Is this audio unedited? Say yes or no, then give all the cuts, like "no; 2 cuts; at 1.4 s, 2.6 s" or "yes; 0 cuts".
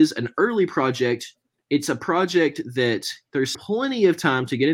no; 1 cut; at 3.5 s